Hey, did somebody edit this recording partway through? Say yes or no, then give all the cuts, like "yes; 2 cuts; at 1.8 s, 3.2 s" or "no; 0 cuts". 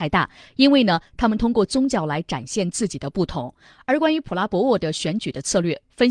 no; 0 cuts